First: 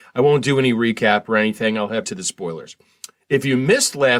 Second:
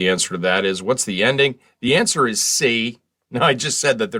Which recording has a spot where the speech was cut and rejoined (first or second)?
first